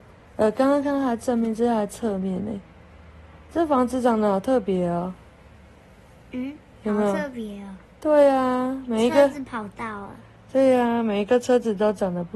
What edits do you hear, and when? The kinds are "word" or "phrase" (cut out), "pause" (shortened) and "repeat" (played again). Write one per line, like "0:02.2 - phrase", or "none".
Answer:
none